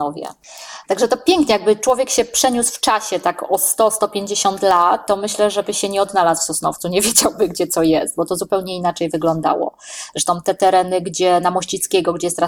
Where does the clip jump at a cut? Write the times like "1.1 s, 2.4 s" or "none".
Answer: none